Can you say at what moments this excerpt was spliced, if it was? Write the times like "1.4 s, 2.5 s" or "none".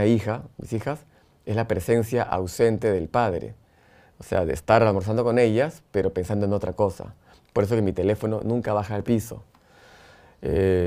9.0 s